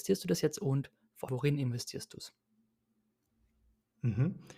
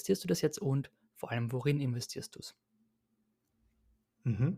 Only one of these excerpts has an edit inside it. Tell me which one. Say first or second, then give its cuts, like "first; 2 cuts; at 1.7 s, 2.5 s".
first; 1 cut; at 1.3 s